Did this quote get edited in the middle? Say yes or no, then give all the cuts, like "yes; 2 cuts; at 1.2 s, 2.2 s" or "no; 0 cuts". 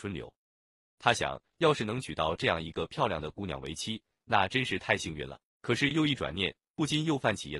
yes; 1 cut; at 5.5 s